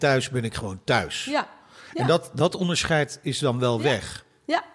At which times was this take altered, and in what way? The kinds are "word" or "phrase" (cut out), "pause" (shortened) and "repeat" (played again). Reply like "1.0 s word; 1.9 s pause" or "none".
none